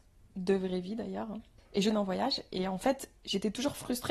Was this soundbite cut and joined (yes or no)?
yes